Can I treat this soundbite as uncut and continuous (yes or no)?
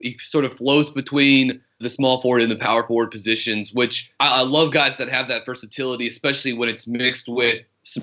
no